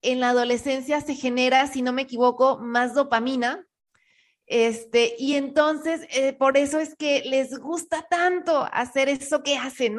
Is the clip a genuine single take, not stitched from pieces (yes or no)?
yes